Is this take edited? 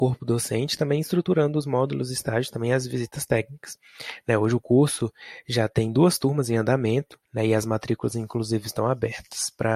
yes; 1 cut; at 7.2 s

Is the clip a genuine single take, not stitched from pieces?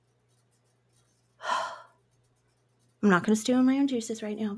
yes; 0 cuts

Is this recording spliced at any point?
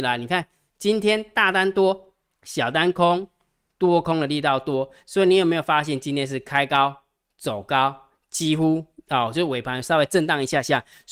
no; 0 cuts

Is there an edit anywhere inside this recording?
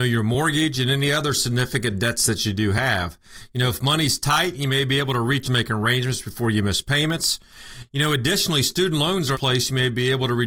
yes; 2 cuts; at 5.4 s, 9.3 s

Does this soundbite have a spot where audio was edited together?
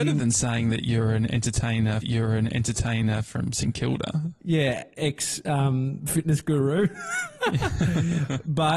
yes; 1 cut; at 2.0 s

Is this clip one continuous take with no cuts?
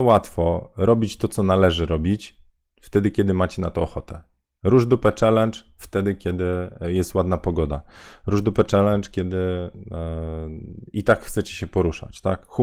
yes; 0 cuts

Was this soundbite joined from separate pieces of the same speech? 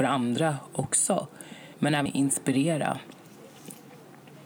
yes; 2 cuts; at 1.7 s, 2.1 s

